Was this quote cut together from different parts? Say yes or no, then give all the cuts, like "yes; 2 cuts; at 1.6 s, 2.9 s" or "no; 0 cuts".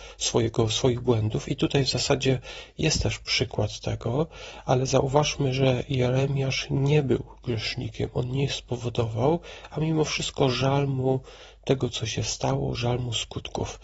no; 0 cuts